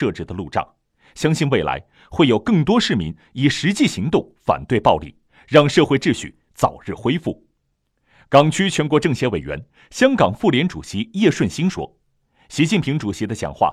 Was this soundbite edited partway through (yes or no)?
no